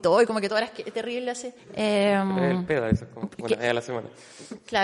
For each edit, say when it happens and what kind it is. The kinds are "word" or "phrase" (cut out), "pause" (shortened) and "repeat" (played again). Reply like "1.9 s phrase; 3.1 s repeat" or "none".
1.6 s pause